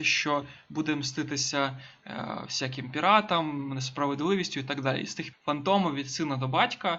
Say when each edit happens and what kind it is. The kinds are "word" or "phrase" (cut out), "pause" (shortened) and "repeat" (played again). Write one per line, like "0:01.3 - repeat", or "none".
0:05.3 - word